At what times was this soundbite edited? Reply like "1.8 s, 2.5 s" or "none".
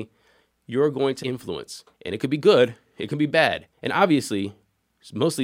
1.2 s, 1.9 s, 3.7 s